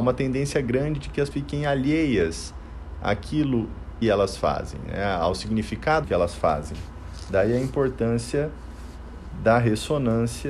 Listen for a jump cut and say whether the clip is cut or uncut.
cut